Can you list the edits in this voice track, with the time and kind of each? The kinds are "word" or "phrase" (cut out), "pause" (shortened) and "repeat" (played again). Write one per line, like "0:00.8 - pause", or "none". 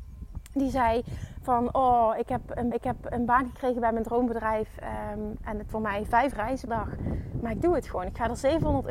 0:02.7 - repeat
0:05.7 - word
0:06.3 - word
0:06.7 - word